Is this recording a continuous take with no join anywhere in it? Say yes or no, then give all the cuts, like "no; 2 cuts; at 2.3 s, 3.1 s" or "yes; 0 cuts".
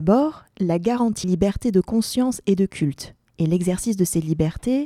no; 1 cut; at 1.2 s